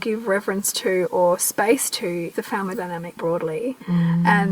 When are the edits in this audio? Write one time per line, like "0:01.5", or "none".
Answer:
0:02.3
0:03.2